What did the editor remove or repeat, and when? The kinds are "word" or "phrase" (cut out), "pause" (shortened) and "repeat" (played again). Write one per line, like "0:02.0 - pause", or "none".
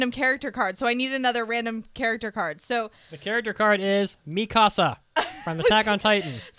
none

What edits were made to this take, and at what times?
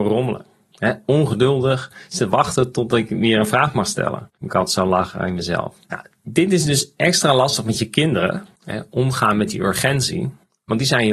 0:04.4 - pause
0:05.8 - pause
0:08.6 - pause

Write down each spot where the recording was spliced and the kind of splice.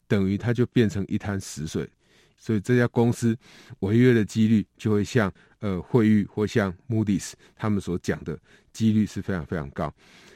none

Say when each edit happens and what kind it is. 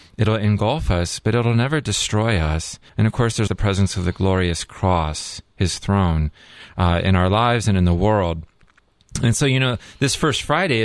0:02.9 - pause
0:03.5 - word

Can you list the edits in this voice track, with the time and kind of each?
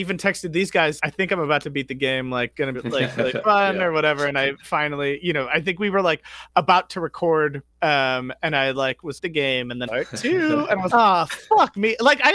0:01.0 - word
0:02.7 - word
0:07.7 - pause
0:09.2 - phrase
0:09.9 - phrase
0:10.9 - word

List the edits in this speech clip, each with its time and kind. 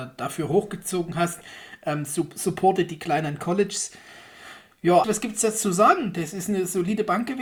0:05.0 - word

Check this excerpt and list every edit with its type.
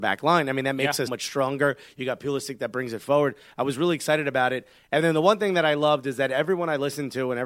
0:01.1 - word

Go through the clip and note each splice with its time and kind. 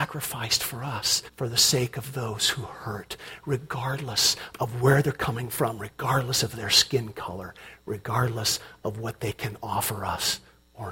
0:01.3 - pause

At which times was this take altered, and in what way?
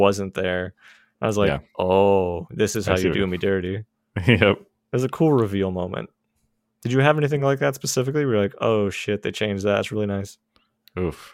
none

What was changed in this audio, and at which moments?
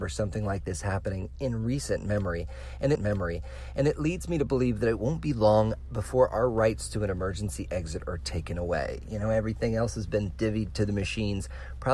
0:02.9 - repeat

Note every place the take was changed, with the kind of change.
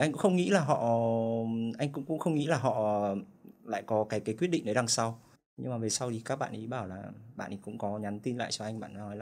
0:05.4 - pause

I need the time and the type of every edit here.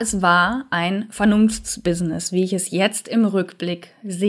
none

